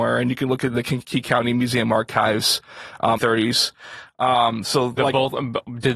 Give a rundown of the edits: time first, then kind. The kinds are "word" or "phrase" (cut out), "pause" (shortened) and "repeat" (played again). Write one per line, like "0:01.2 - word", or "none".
0:03.2 - phrase
0:05.0 - word